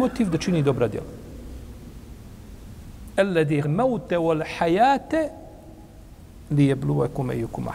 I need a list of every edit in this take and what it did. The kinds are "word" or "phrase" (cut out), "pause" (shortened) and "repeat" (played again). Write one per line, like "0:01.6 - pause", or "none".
0:03.6 - word